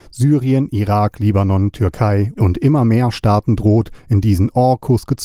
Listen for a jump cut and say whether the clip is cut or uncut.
cut